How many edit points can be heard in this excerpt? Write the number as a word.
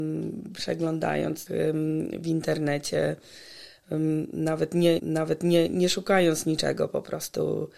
two